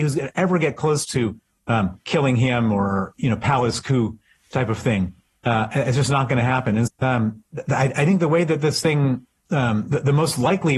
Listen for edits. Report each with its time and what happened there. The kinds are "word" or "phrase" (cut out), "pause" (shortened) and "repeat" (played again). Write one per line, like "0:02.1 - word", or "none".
0:06.9 - word